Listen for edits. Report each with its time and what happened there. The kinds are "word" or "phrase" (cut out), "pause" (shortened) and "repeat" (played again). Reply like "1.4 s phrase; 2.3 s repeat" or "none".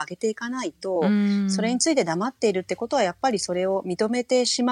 none